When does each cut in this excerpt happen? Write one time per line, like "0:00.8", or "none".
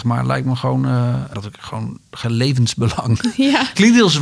0:01.3
0:02.2